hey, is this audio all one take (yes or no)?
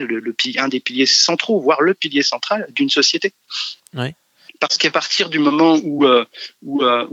yes